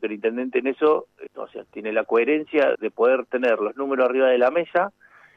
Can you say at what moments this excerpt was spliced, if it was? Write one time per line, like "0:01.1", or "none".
0:01.3
0:02.7

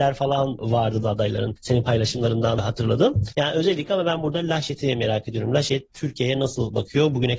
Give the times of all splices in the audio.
0:01.0

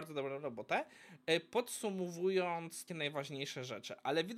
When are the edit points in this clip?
0:02.9

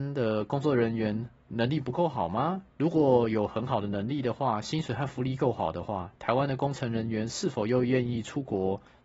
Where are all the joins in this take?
0:02.7

